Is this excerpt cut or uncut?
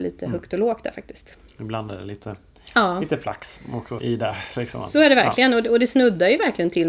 cut